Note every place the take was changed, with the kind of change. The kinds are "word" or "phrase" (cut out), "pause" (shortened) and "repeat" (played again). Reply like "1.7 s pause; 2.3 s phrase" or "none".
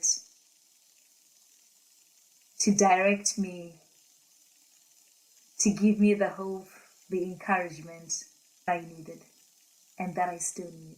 8.7 s word